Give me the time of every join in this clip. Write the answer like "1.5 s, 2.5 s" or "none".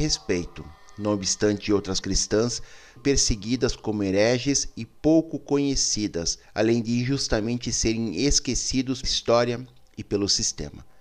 2.0 s, 3.0 s, 6.4 s, 9.0 s